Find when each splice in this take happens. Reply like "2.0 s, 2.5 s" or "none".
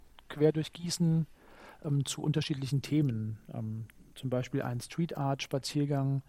none